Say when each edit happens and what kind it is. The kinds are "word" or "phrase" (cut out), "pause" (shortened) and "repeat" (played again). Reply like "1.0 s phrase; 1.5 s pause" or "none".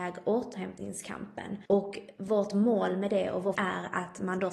1.7 s pause; 3.5 s word